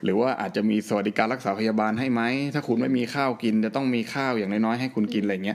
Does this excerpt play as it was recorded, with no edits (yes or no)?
yes